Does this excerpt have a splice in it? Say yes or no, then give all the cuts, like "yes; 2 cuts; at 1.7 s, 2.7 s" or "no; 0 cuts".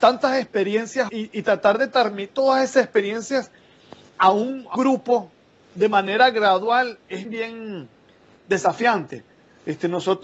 yes; 6 cuts; at 1.1 s, 2.3 s, 4.1 s, 4.7 s, 7.2 s, 8.4 s